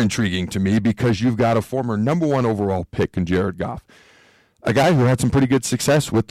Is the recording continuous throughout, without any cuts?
yes; 0 cuts

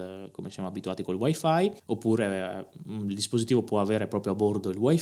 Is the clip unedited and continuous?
no; 1 cut; at 1.8 s

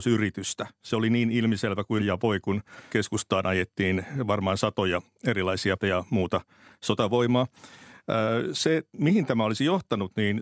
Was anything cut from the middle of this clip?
yes; 3 cuts; at 2.0 s, 2.9 s, 5.8 s

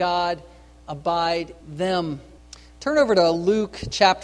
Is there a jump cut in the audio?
yes; 2 cuts; at 1.6 s, 2.4 s

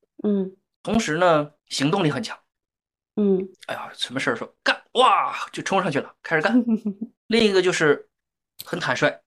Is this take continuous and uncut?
no; 3 cuts; at 1.6 s, 3.5 s, 7.2 s

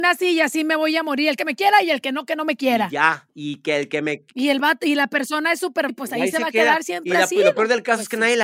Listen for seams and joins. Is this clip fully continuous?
no; 3 cuts; at 1.4 s, 3.3 s, 5.9 s

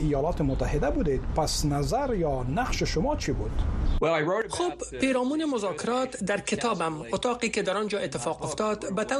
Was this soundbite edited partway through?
no; 0 cuts

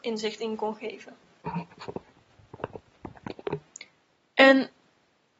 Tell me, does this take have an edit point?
no; 0 cuts

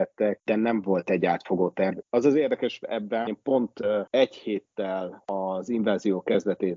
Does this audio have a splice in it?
yes; 2 cuts; at 2.0 s, 3.3 s

